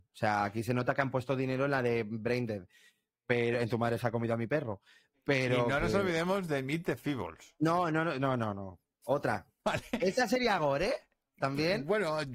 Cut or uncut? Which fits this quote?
uncut